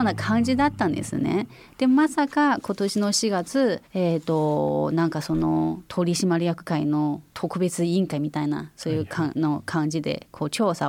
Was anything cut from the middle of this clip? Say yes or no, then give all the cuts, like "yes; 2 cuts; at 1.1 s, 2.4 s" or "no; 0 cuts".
yes; 1 cut; at 3.9 s